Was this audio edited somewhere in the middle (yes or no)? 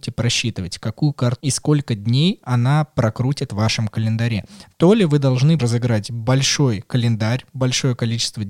yes